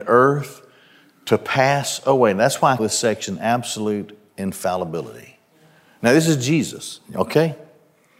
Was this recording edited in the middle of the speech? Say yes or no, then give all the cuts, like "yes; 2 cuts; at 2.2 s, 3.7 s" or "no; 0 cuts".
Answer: yes; 1 cut; at 2.8 s